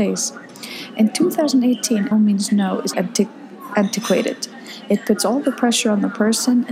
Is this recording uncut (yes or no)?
no